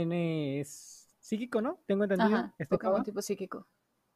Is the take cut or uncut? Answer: uncut